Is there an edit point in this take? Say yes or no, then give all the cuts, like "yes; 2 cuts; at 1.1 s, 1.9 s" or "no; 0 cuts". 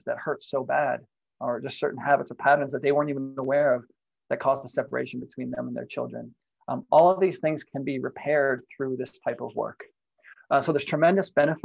no; 0 cuts